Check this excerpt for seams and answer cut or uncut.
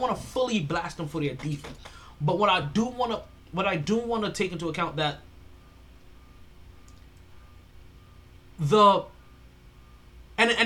uncut